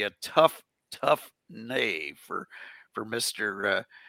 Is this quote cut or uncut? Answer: uncut